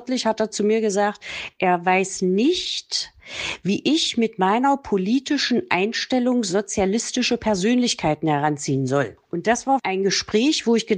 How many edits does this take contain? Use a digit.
0